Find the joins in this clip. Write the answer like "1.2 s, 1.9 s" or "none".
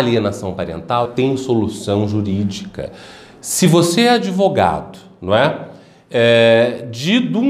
1.0 s